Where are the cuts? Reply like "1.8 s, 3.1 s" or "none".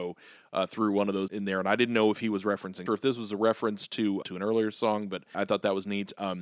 1.3 s, 2.9 s, 4.2 s, 5.3 s